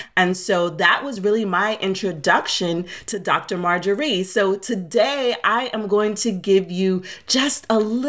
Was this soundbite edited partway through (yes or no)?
no